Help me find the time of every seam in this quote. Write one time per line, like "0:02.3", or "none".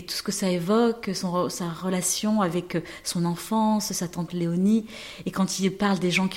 none